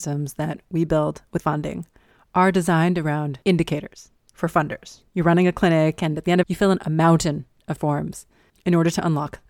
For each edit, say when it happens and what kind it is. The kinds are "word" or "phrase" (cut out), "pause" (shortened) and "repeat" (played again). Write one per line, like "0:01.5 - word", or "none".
0:01.4 - word
0:03.4 - pause
0:05.1 - pause
0:06.4 - phrase
0:07.8 - word